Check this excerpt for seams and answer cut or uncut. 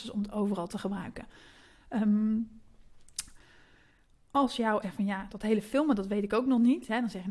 cut